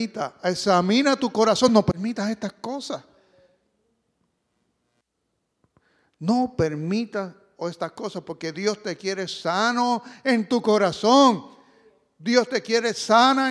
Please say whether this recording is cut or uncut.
uncut